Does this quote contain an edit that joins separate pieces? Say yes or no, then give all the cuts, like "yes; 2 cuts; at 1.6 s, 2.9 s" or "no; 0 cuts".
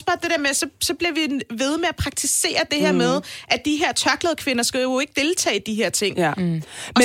no; 0 cuts